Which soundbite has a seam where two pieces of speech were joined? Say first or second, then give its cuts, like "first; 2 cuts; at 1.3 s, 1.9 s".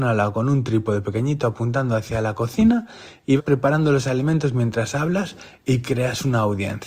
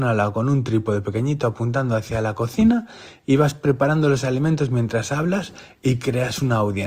first; 1 cut; at 3.4 s